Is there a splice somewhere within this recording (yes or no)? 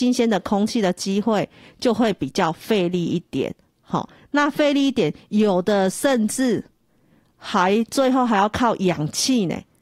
no